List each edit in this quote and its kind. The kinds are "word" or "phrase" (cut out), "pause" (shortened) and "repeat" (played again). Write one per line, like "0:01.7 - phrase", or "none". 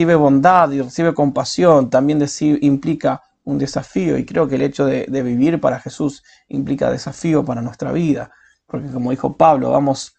none